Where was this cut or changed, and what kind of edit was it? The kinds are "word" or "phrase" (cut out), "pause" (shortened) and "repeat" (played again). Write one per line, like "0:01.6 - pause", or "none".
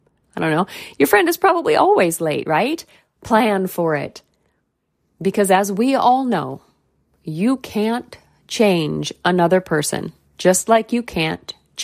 none